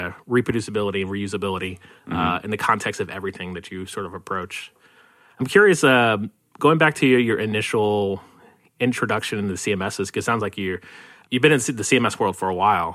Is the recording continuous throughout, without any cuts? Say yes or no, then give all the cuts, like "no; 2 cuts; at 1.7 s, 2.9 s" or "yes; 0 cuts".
yes; 0 cuts